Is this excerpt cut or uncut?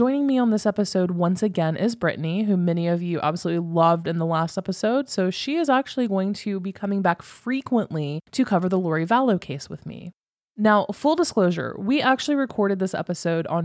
uncut